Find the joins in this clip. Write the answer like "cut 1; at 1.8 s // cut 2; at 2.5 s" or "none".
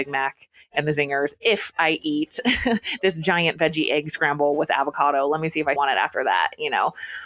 cut 1; at 5.8 s